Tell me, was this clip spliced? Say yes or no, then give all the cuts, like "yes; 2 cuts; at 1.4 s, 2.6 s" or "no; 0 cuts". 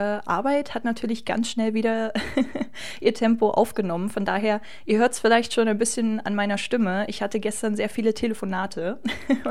no; 0 cuts